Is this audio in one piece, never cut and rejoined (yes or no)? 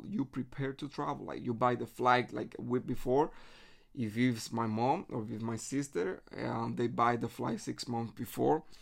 yes